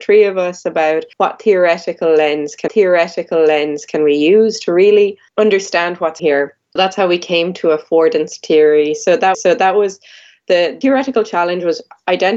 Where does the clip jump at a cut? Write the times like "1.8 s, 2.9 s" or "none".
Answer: 1.1 s, 2.7 s, 5.3 s, 6.2 s, 6.8 s, 9.3 s, 10.8 s